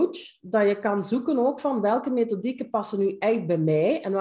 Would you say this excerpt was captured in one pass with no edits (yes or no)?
yes